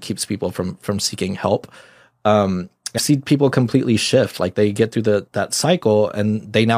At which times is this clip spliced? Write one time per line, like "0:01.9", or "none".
0:03.0
0:05.3